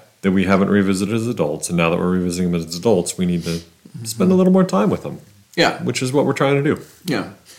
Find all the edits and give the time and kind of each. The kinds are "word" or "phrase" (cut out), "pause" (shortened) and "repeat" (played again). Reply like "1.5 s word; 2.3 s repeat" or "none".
none